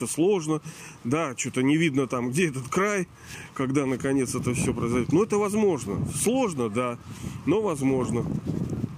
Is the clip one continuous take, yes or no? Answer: yes